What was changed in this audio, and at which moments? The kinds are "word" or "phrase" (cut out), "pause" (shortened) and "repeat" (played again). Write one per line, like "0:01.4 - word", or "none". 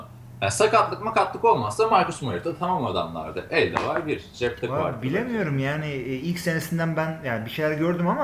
none